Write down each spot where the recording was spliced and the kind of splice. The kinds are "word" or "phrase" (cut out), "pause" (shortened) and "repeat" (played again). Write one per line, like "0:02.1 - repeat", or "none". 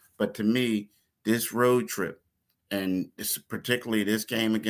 none